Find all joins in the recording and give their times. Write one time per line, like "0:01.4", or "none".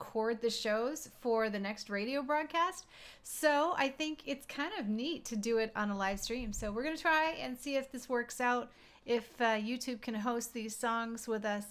none